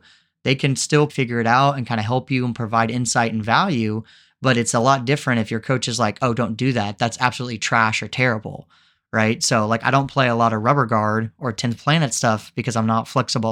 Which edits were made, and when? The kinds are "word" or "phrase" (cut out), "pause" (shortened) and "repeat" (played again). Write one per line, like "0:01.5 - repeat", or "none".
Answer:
0:01.1 - word